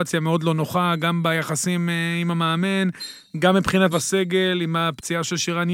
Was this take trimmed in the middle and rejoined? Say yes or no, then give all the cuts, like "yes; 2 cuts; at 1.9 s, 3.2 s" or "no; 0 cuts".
yes; 1 cut; at 3.9 s